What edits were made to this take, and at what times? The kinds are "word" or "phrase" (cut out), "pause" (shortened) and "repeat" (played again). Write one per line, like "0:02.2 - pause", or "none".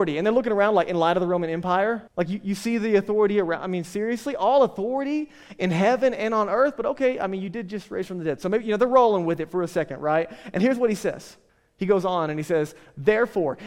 0:02.1 - pause
0:11.5 - pause